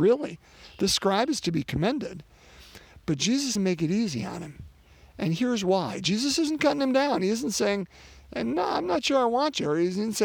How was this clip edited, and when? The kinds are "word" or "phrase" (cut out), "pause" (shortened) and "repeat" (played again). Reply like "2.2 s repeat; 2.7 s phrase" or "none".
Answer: 3.6 s word